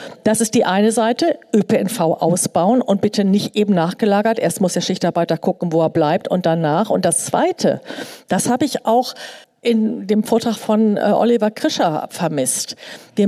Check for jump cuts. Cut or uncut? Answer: cut